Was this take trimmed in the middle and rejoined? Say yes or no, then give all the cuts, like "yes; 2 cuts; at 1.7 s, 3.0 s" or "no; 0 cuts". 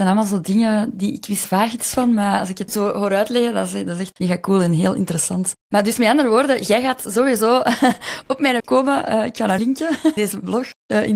yes; 6 cuts; at 1.4 s, 2.7 s, 4.1 s, 8.6 s, 9.6 s, 10.2 s